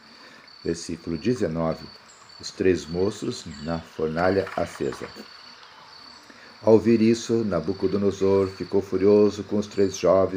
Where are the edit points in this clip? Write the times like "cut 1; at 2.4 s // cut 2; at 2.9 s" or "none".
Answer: none